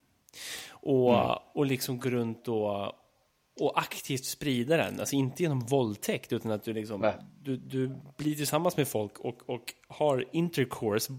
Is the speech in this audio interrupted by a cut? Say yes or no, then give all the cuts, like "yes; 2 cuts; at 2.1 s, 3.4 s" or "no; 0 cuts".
no; 0 cuts